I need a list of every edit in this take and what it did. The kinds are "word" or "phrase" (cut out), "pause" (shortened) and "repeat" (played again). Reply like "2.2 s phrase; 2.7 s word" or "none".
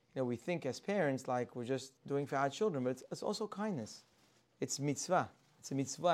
2.0 s pause